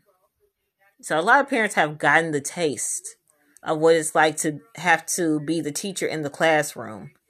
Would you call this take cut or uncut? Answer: uncut